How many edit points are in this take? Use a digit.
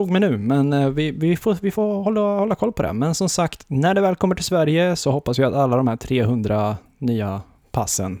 0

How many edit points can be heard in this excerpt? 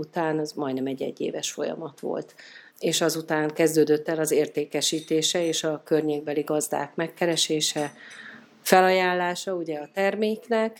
1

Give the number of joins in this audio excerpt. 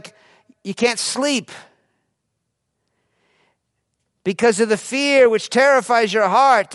0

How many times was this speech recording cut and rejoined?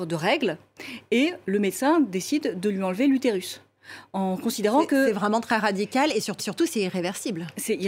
1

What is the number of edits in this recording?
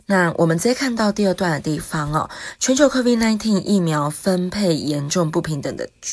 0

